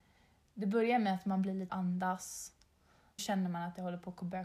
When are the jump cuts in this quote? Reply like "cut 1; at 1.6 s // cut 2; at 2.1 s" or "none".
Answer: cut 1; at 1.7 s // cut 2; at 3.2 s